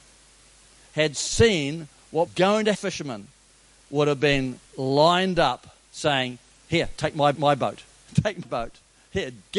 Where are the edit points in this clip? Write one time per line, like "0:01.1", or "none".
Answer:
0:02.3
0:02.7
0:04.7
0:05.8
0:07.3
0:08.4